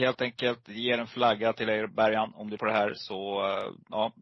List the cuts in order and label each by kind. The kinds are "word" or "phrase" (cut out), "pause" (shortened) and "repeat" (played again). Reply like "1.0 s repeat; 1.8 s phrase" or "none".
2.6 s word